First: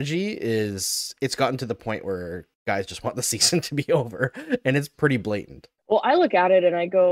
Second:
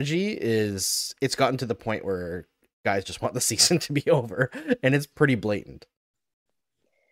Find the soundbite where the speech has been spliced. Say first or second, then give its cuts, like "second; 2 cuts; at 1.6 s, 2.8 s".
first; 2 cuts; at 2.5 s, 5.8 s